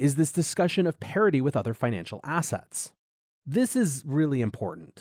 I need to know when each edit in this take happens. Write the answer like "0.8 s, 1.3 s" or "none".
none